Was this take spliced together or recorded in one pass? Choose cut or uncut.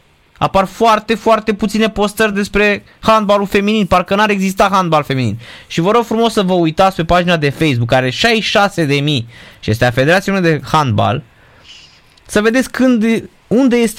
uncut